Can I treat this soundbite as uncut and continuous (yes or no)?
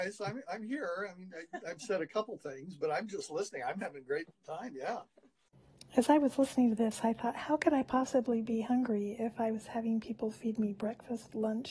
yes